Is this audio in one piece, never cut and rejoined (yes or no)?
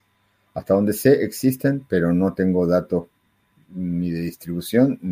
yes